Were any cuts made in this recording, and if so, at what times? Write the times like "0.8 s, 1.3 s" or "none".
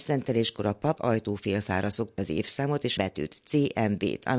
1.0 s, 2.2 s, 3.0 s